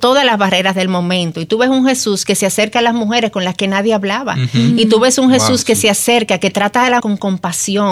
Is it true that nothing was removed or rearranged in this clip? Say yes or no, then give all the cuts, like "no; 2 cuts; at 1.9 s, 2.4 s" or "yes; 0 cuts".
no; 1 cut; at 7.0 s